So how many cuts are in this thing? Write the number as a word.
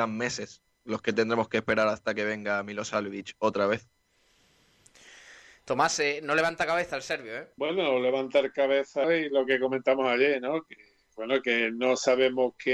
two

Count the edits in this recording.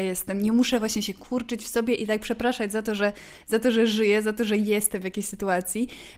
zero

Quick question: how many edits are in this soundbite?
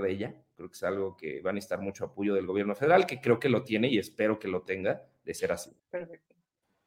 one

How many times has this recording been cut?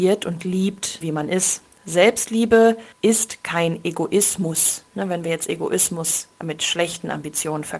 two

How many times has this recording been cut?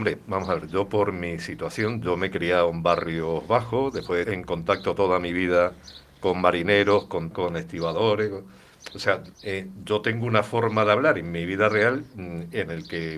three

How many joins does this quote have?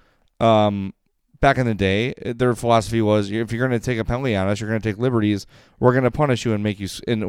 zero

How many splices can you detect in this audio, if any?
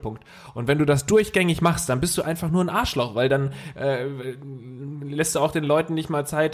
zero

